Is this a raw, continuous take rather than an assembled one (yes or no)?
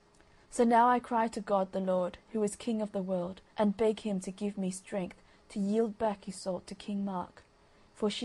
no